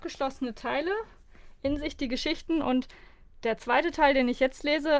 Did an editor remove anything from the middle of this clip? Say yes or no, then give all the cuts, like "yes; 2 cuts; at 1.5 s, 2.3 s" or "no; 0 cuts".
no; 0 cuts